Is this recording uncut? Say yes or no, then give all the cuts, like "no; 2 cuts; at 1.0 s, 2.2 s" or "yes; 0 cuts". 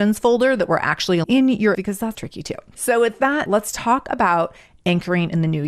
no; 4 cuts; at 1.2 s, 1.7 s, 2.1 s, 3.5 s